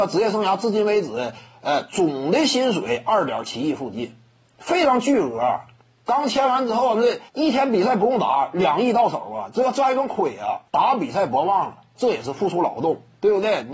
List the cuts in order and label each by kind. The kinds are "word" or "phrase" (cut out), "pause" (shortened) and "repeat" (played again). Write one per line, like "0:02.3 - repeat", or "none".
0:07.3 - pause
0:10.7 - pause